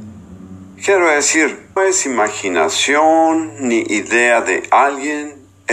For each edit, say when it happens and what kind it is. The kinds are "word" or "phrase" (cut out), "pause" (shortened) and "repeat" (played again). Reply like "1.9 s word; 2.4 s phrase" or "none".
1.8 s word